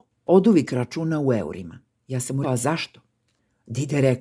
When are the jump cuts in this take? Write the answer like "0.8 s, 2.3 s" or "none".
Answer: 2.4 s